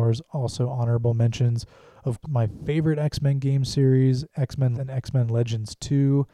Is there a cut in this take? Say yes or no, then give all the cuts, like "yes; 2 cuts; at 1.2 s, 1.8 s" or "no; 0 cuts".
yes; 2 cuts; at 2.2 s, 4.7 s